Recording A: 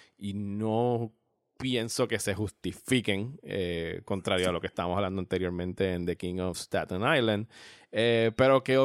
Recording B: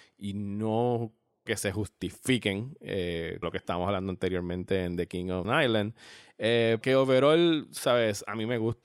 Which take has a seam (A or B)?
B